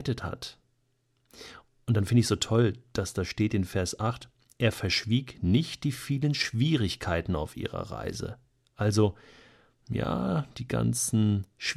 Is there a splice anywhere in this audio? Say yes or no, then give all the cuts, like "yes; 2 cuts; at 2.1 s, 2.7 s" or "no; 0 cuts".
no; 0 cuts